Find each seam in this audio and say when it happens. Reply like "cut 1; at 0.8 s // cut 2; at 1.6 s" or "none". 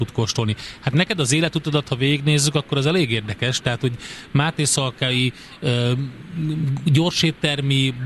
none